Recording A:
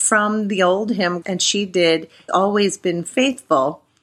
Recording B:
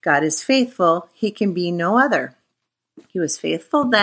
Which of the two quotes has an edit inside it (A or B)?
A